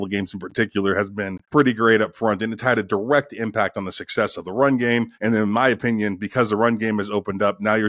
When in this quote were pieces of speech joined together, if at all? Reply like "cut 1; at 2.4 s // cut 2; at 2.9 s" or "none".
cut 1; at 1.4 s // cut 2; at 5.1 s